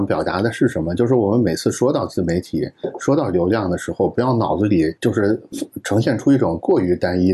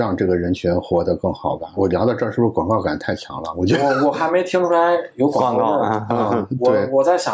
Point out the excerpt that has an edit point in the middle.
first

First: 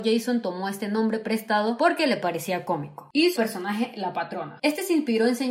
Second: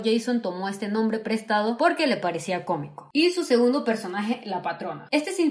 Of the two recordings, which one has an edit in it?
first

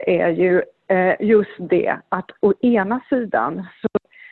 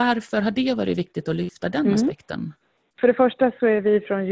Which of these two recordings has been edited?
second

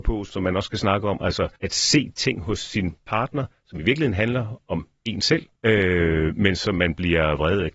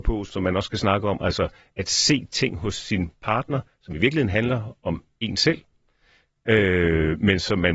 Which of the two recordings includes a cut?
first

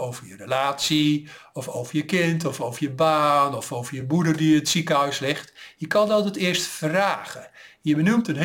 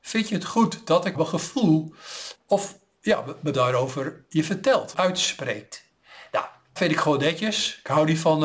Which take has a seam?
second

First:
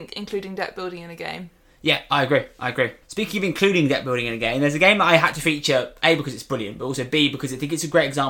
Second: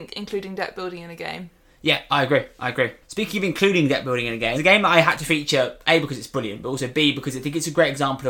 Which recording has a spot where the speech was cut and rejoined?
second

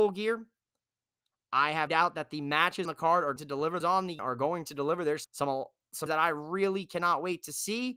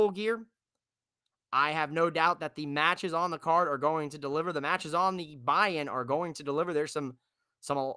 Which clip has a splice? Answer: first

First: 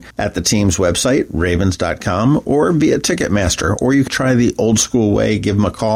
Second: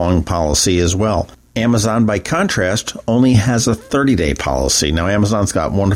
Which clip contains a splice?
first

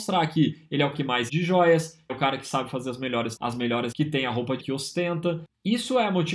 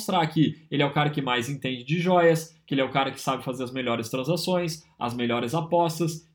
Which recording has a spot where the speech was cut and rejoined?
first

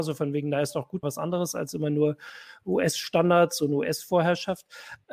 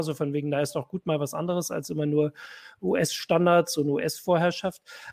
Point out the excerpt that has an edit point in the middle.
first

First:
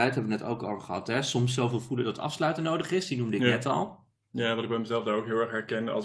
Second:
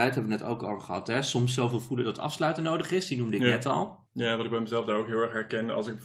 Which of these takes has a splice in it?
second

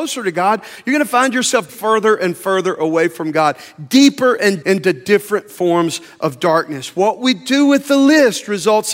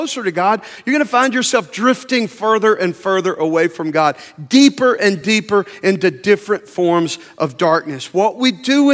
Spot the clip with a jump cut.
first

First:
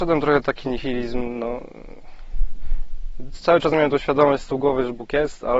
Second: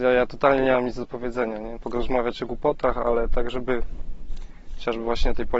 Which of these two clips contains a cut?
second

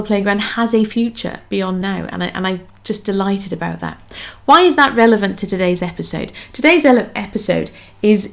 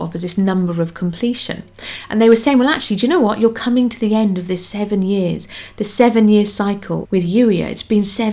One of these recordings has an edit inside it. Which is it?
second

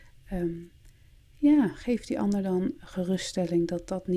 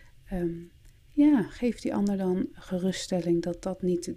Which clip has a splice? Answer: second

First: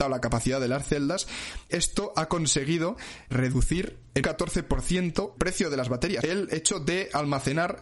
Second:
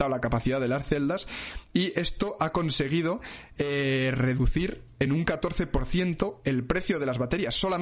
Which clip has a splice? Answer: first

